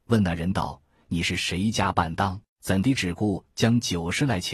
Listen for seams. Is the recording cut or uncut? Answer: cut